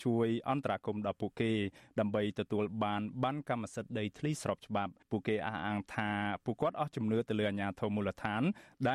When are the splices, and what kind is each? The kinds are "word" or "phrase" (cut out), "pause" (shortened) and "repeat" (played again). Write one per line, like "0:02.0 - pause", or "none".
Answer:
0:05.0 - pause